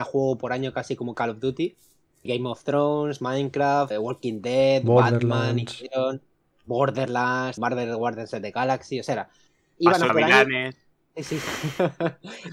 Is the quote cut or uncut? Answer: cut